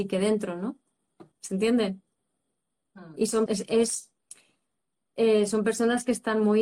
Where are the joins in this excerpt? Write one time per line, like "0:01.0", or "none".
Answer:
0:01.3
0:03.5